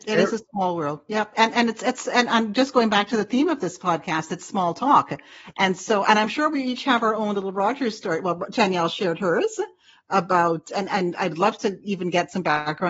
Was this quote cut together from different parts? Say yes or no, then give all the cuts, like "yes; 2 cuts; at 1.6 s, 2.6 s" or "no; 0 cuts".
no; 0 cuts